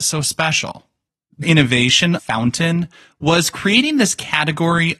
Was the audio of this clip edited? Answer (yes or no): yes